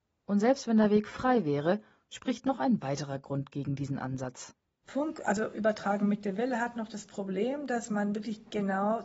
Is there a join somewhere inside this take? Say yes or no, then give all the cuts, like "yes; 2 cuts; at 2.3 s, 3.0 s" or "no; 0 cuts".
no; 0 cuts